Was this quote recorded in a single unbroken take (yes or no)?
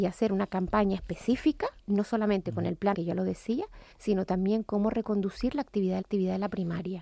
no